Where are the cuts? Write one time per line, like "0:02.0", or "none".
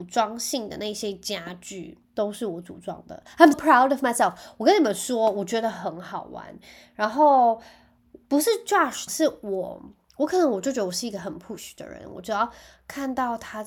0:02.0
0:03.5
0:08.2
0:09.1